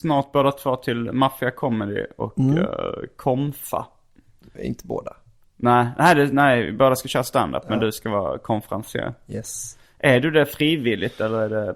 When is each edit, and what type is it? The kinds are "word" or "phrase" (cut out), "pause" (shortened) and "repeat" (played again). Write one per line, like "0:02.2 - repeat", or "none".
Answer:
none